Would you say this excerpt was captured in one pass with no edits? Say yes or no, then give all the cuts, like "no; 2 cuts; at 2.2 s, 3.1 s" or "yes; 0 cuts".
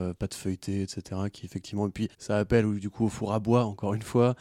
no; 1 cut; at 2.1 s